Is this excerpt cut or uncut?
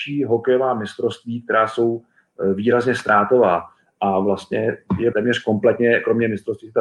cut